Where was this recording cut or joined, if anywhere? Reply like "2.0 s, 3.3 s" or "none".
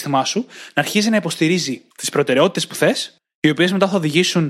1.9 s, 3.2 s